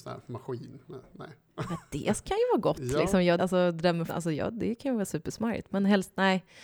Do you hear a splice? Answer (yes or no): yes